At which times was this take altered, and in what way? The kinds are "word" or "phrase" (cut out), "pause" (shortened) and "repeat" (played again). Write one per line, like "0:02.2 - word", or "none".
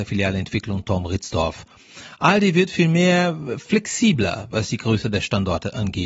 none